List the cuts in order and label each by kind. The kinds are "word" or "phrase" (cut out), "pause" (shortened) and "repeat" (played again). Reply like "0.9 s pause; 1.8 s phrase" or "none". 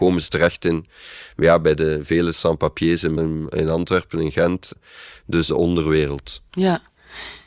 3.2 s word; 5.5 s phrase